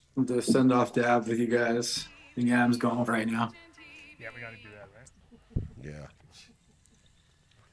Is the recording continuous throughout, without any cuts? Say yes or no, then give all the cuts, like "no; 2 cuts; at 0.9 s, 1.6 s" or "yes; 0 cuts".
no; 1 cut; at 3.1 s